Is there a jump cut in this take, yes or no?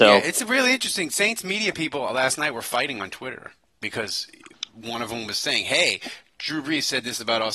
no